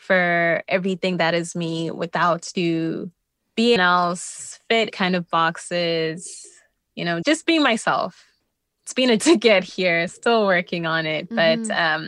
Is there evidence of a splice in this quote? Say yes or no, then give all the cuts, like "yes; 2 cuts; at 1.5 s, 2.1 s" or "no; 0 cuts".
yes; 6 cuts; at 2.5 s, 3.8 s, 4.9 s, 7.2 s, 9.2 s, 10.1 s